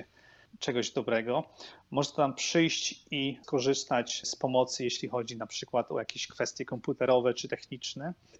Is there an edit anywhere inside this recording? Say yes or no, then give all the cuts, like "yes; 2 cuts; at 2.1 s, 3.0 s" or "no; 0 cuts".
no; 0 cuts